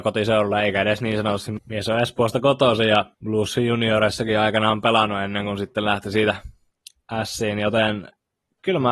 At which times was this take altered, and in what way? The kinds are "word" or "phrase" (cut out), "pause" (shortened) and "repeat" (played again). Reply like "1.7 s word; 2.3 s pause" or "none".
3.1 s pause